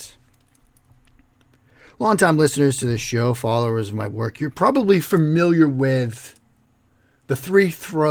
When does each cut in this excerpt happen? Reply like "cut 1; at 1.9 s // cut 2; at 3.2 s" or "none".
none